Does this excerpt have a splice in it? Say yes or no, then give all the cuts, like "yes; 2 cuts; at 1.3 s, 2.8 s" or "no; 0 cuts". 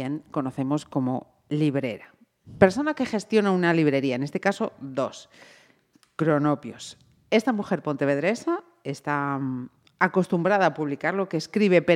no; 0 cuts